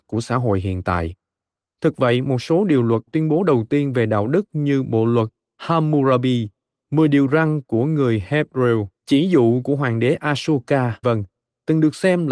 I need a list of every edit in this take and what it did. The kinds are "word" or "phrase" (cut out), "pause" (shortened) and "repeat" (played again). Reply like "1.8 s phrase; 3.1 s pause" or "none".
3.1 s word; 9.0 s pause; 11.0 s word